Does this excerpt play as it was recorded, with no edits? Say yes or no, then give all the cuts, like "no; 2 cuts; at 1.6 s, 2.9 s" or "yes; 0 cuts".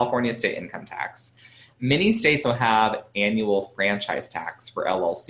no; 1 cut; at 2.4 s